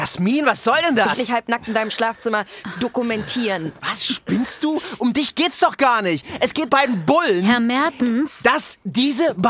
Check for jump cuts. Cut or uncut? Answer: cut